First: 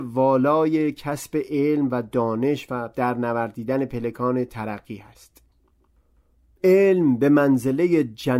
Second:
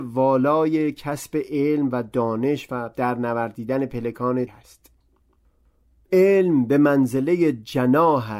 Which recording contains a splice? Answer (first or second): second